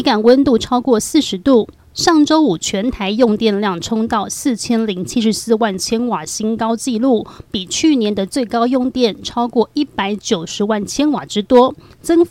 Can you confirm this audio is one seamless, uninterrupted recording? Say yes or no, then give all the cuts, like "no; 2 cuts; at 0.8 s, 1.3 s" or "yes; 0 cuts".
yes; 0 cuts